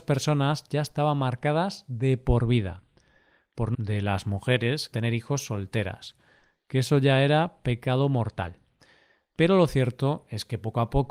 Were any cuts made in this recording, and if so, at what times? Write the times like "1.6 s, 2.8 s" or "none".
3.7 s, 4.9 s